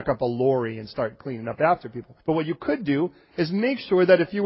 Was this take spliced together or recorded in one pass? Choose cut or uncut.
cut